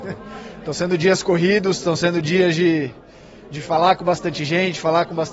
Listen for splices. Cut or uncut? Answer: uncut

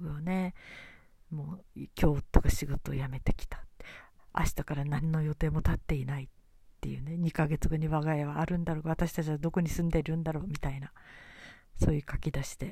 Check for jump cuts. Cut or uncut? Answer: uncut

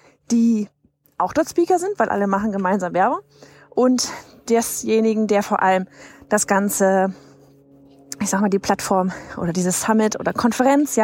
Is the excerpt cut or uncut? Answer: uncut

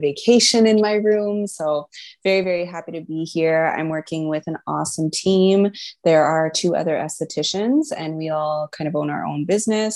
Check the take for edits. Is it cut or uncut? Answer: uncut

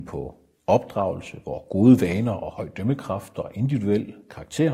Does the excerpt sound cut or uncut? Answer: uncut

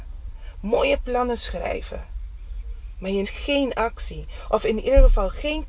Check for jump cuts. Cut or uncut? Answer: cut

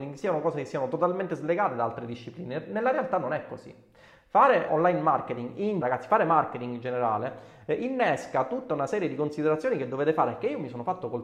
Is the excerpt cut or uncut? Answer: cut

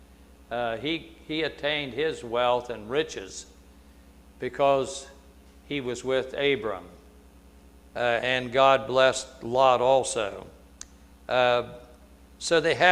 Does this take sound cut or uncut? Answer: uncut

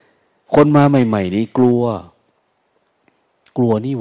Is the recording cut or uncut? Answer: uncut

